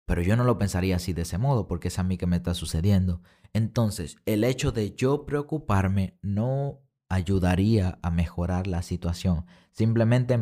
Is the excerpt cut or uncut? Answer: uncut